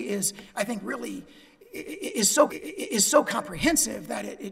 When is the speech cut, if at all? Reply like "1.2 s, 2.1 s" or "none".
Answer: 2.5 s